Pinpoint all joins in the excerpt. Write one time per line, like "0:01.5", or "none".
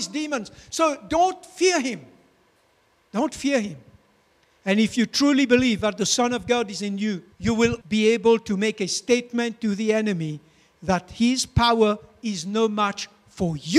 0:06.8
0:07.3
0:07.8